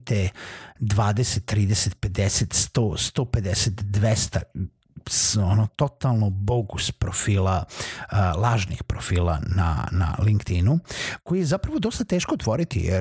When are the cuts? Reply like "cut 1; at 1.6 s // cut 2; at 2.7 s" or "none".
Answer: none